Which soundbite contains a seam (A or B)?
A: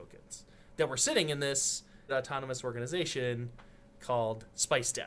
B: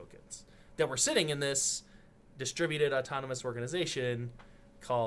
A